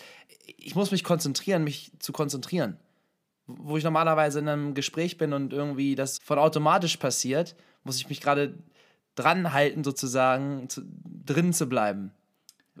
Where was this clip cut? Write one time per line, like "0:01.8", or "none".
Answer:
0:06.2